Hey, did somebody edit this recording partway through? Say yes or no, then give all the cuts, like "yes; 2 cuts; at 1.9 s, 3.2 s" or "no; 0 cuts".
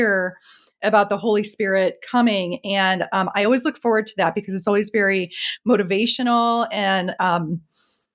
no; 0 cuts